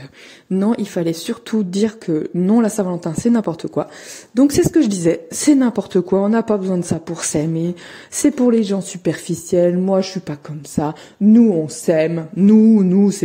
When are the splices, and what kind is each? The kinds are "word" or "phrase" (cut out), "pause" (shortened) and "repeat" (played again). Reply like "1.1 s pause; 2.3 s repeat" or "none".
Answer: none